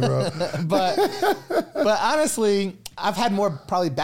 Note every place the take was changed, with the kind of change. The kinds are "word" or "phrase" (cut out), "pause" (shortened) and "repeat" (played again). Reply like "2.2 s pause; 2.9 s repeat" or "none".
none